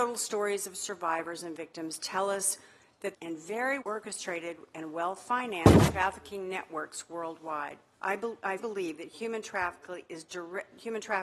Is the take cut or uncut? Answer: cut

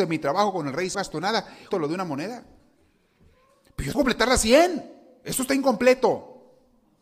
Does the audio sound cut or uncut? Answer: cut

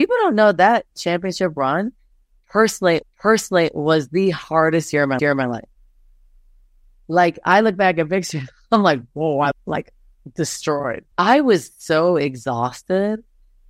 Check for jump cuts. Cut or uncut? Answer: cut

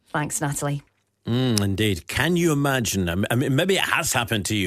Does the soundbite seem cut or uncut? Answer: uncut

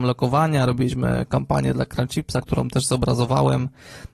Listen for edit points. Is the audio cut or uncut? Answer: cut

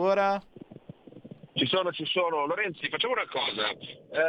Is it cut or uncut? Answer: cut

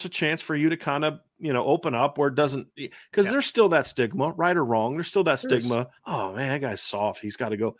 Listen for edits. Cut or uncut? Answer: cut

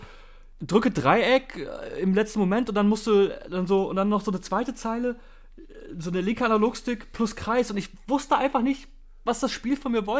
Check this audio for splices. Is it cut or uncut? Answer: uncut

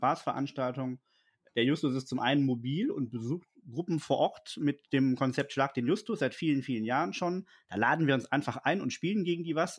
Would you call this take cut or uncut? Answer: uncut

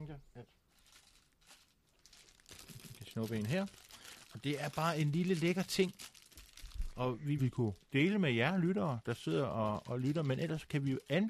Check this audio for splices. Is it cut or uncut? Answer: cut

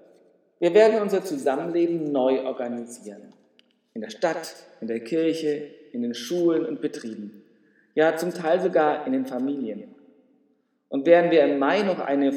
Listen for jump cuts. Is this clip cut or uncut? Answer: uncut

